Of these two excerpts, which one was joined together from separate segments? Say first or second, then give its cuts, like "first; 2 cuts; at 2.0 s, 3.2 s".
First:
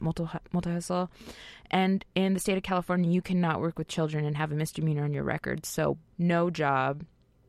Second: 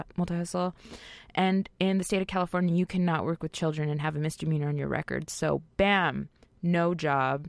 first; 1 cut; at 6.1 s